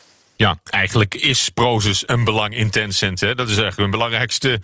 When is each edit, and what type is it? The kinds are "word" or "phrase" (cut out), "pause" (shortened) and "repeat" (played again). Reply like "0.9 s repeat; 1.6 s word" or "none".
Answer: 2.1 s word